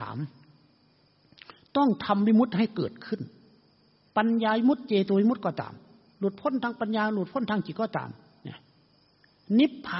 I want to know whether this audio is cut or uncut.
uncut